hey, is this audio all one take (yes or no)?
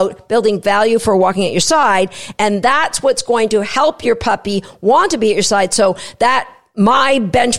yes